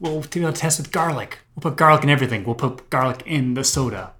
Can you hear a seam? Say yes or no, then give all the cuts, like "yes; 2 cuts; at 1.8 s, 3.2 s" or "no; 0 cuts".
no; 0 cuts